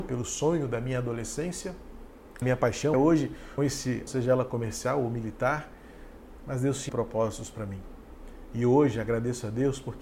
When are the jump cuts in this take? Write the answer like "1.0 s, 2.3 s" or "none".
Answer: 2.4 s, 2.9 s, 3.6 s, 4.1 s, 6.9 s